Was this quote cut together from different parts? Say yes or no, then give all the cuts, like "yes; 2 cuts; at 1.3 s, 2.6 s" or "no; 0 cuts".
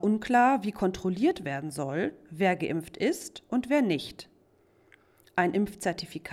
no; 0 cuts